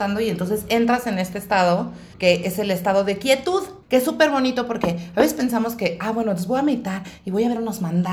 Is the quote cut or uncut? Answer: cut